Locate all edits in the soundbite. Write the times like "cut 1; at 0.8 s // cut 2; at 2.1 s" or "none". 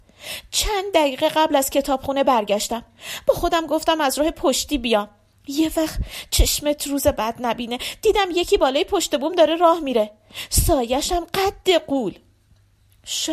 none

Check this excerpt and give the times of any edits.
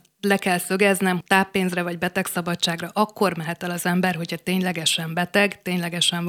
cut 1; at 1.2 s

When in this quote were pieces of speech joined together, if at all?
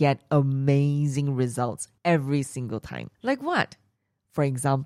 cut 1; at 2.0 s // cut 2; at 3.1 s

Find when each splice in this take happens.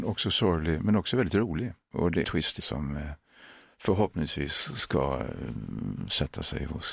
cut 1; at 2.2 s // cut 2; at 2.6 s

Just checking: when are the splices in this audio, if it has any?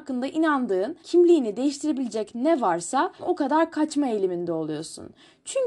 cut 1; at 1.0 s // cut 2; at 3.2 s

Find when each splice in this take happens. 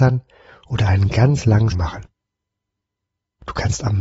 cut 1; at 1.7 s

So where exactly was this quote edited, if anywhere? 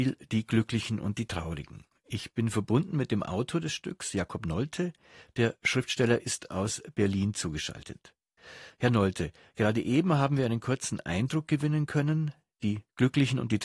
none

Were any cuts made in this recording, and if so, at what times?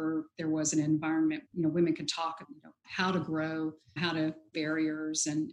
cut 1; at 1.5 s // cut 2; at 2.4 s // cut 3; at 2.8 s // cut 4; at 4.0 s // cut 5; at 4.5 s

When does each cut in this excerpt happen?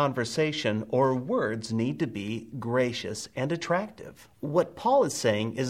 cut 1; at 4.3 s

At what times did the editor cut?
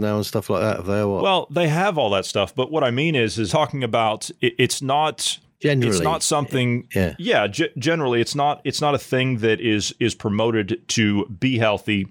cut 1; at 3.5 s

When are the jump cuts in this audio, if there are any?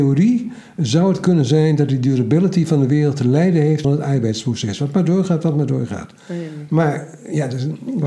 cut 1; at 3.8 s

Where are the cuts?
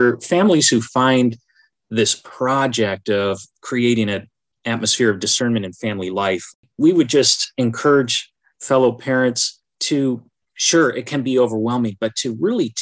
none

